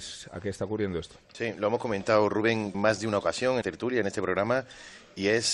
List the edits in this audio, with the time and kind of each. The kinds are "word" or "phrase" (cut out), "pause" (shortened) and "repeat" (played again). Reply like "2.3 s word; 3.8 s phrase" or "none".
2.7 s word; 3.6 s word